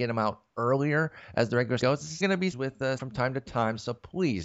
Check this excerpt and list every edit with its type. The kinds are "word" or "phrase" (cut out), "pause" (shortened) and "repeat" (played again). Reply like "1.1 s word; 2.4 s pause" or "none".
1.8 s word; 2.2 s word; 2.5 s phrase; 3.0 s word